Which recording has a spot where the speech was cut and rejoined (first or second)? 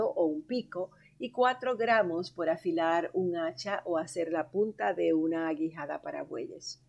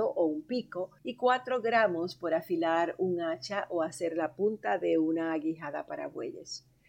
second